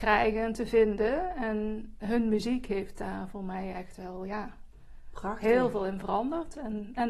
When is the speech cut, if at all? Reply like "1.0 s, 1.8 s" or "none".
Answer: none